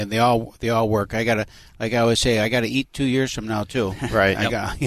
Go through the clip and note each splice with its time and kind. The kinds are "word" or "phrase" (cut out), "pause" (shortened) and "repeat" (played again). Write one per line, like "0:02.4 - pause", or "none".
none